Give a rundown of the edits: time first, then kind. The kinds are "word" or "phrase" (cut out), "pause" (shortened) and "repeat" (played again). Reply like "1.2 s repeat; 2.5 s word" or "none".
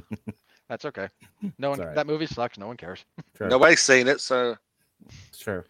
3.3 s pause